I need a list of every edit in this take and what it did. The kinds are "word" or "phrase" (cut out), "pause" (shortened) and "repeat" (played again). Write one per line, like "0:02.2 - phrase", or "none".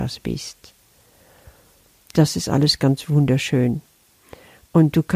none